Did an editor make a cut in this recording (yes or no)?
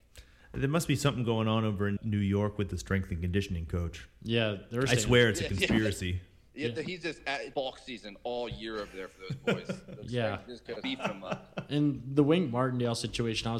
yes